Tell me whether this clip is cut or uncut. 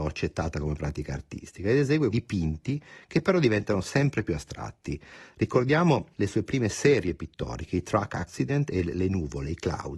cut